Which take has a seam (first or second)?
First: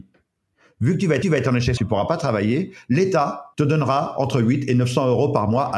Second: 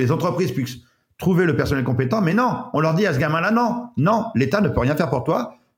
first